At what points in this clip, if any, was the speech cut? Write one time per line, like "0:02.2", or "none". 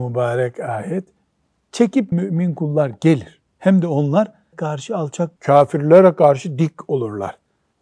0:02.1
0:03.5
0:04.5
0:05.4